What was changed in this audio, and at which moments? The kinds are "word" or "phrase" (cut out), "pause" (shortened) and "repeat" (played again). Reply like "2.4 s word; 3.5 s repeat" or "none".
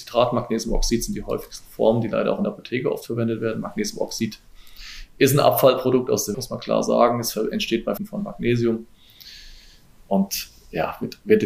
6.3 s word; 8.0 s word